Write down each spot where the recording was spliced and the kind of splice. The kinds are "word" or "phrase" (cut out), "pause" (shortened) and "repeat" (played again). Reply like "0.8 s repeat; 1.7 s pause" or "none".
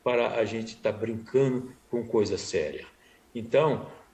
none